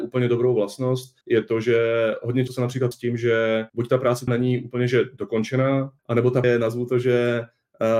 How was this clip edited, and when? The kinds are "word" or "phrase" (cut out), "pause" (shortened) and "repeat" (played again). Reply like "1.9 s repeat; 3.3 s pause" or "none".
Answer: 1.2 s pause; 2.5 s word; 2.9 s word; 3.7 s pause; 4.3 s word; 6.0 s pause; 6.4 s word